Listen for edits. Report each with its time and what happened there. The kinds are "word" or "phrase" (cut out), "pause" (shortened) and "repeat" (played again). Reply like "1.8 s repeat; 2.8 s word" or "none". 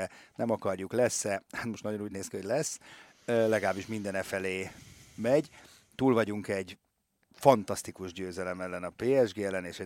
none

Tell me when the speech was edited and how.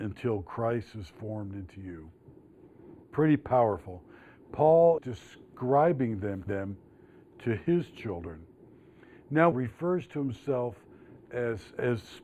3.0 s pause; 5.0 s word; 6.5 s word; 9.5 s phrase

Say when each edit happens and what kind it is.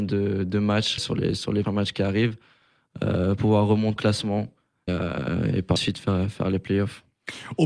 1.0 s word; 1.6 s word; 3.4 s word; 4.0 s word; 4.9 s word; 5.8 s word

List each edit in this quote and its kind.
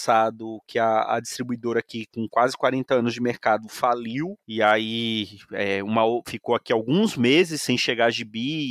4.4 s pause

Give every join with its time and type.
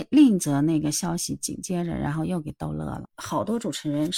3.1 s pause

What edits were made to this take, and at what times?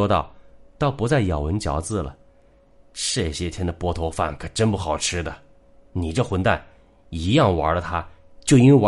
none

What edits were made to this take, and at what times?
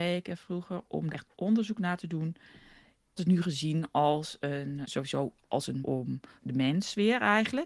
1.1 s word; 3.2 s word; 4.8 s word; 5.8 s word; 6.4 s word

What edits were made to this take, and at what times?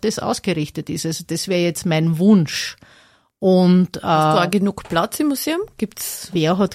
none

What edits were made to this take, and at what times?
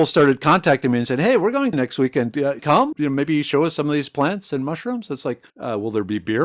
1.7 s word; 2.6 s phrase; 2.9 s word; 5.5 s pause

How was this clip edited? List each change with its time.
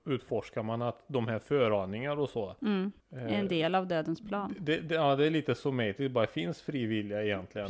3.0 s pause

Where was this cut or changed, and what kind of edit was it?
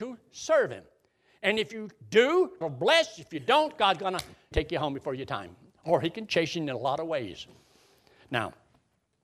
2.6 s word; 4.5 s word

